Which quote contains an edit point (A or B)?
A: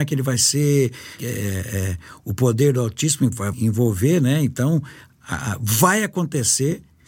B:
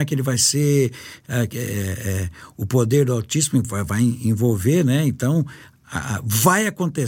A